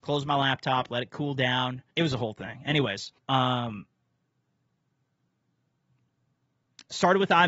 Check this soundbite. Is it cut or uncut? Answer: cut